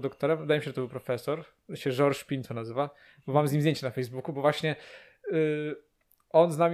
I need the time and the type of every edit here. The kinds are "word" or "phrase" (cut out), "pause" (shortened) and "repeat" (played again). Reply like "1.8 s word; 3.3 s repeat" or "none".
none

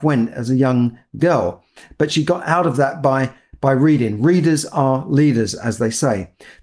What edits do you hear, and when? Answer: none

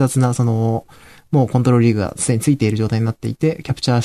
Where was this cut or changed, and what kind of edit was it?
none

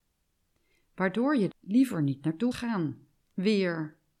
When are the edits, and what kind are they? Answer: 1.5 s word; 2.5 s word

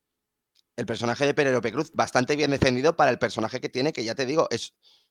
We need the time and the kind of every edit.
none

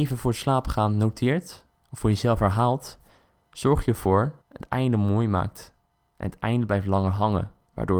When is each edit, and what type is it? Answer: 4.4 s phrase

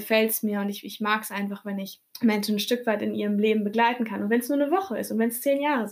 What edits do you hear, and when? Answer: 2.1 s pause

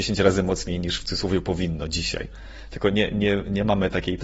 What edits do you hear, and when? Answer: none

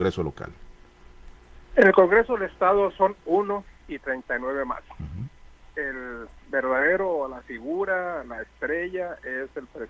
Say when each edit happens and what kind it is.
1.6 s pause; 3.8 s pause; 7.4 s word

